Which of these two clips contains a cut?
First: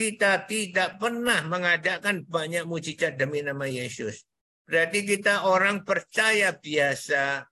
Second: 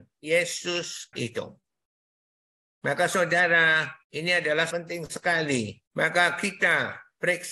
second; 4 cuts; at 1.1 s, 4.0 s, 4.7 s, 5.9 s

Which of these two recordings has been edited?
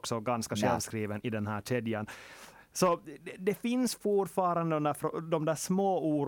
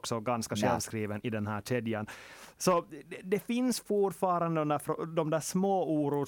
second; 1 cut; at 2.5 s

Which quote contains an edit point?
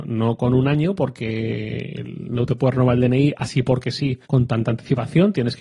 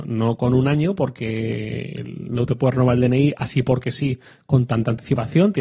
first; 1 cut; at 4.2 s

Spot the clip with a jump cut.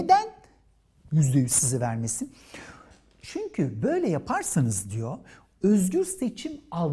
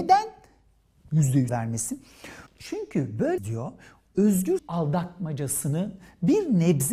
second; 4 cuts; at 1.5 s, 2.5 s, 3.4 s, 4.6 s

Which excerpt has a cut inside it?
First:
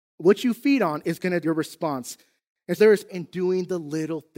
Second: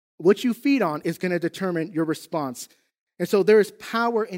first; 3 cuts; at 1.4 s, 2.8 s, 3.1 s

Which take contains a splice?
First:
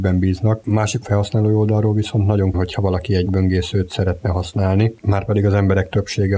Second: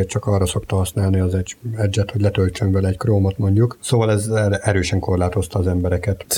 first; 3 cuts; at 1.0 s, 2.5 s, 3.3 s

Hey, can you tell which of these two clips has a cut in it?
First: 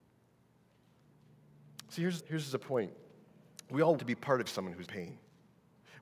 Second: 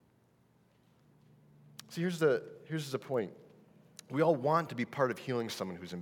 first; 4 cuts; at 2.2 s, 4.0 s, 4.5 s, 4.8 s

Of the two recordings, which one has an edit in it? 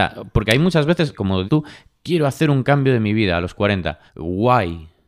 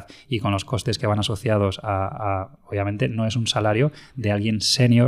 first; 3 cuts; at 1.1 s, 1.5 s, 4.1 s

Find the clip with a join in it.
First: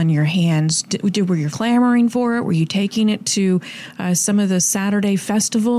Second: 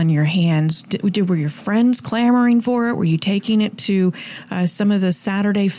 first; 1 cut; at 1.5 s

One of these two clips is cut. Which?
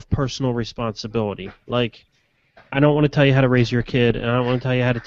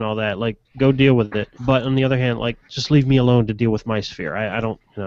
second; 2 cuts; at 1.6 s, 2.7 s

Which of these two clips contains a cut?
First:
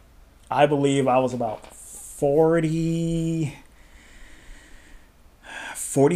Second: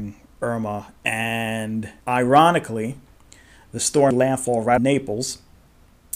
second; 3 cuts; at 2.0 s, 4.1 s, 4.8 s

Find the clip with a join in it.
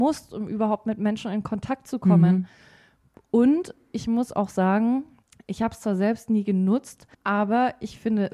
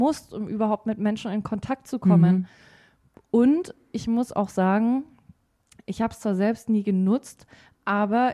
first; 2 cuts; at 5.2 s, 7.1 s

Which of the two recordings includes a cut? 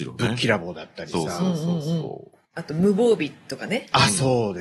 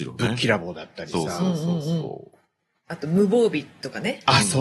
first; 1 cut; at 2.5 s

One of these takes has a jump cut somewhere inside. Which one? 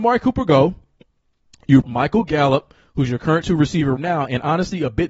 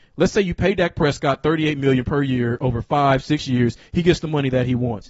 first; 3 cuts; at 1.8 s, 3.4 s, 4.0 s

